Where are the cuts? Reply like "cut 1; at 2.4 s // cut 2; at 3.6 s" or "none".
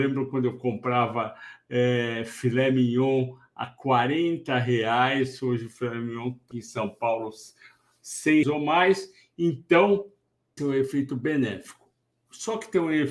cut 1; at 6.5 s // cut 2; at 8.4 s // cut 3; at 10.6 s